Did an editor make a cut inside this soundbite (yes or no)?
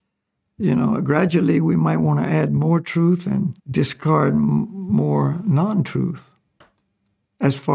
yes